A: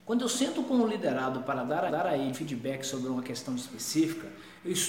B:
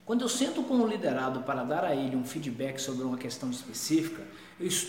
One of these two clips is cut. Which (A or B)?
A